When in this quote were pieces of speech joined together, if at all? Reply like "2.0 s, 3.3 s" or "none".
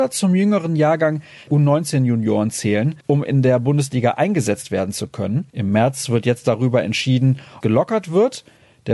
1.5 s, 3.0 s, 5.5 s, 7.6 s